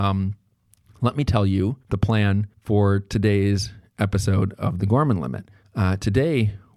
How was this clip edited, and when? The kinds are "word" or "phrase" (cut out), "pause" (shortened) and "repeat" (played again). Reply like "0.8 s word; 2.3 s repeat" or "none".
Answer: 1.8 s pause; 2.5 s pause; 5.6 s pause